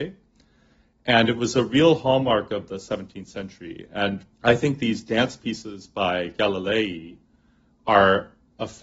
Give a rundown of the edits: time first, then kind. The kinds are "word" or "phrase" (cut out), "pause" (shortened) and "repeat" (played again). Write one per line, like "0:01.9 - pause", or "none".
0:04.3 - pause